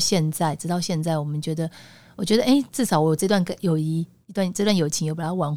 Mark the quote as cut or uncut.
uncut